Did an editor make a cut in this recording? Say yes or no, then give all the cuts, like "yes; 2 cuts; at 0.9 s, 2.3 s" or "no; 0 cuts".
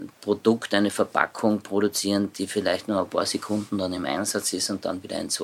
no; 0 cuts